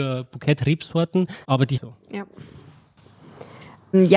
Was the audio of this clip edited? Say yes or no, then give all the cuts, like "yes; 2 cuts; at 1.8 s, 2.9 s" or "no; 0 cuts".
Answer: yes; 2 cuts; at 1.4 s, 1.7 s